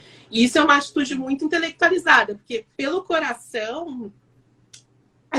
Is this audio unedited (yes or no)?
no